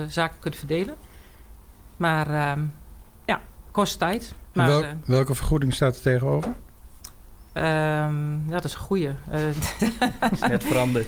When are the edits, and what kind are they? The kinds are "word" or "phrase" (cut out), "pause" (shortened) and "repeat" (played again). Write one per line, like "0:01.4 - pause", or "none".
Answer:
none